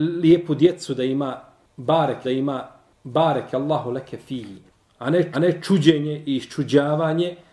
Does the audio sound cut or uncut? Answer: cut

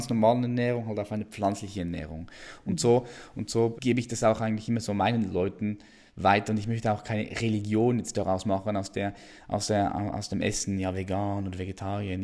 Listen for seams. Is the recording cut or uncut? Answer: cut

